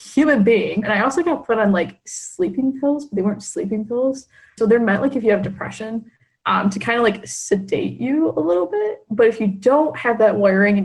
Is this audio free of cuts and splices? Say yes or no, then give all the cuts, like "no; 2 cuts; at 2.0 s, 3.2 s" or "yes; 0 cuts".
yes; 0 cuts